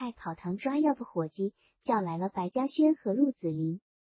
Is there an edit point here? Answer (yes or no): no